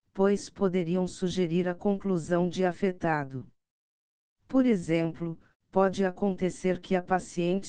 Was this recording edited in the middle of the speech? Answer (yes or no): no